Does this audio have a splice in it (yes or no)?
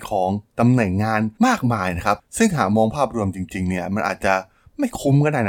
yes